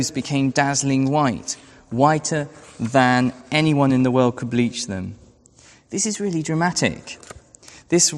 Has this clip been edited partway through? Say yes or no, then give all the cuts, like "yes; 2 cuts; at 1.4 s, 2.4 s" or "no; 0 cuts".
no; 0 cuts